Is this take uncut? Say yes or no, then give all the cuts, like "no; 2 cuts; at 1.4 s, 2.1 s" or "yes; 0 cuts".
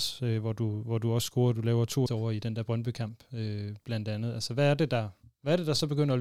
no; 1 cut; at 2.1 s